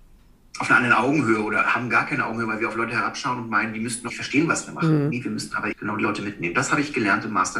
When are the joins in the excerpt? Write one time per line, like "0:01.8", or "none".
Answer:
0:04.1
0:05.7